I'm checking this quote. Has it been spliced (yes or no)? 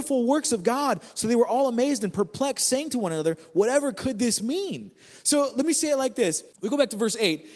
yes